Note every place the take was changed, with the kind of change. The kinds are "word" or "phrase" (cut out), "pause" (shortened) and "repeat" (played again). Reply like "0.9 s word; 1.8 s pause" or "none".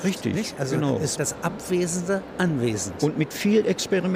1.2 s word